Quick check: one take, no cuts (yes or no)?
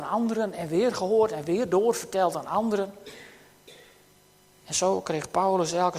yes